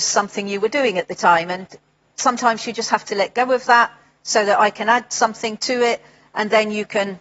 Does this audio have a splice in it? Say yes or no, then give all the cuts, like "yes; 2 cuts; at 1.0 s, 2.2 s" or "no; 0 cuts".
no; 0 cuts